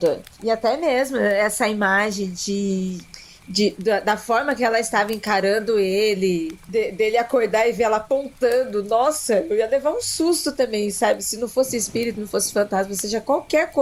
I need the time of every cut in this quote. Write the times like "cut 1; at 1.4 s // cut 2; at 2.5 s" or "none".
none